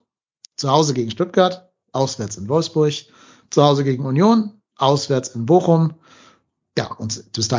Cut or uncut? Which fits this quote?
uncut